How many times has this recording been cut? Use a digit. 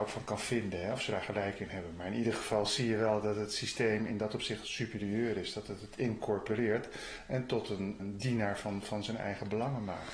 2